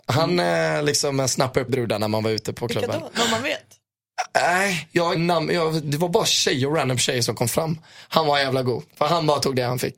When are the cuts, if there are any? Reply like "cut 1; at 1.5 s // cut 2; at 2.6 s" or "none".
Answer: cut 1; at 1.7 s // cut 2; at 5.1 s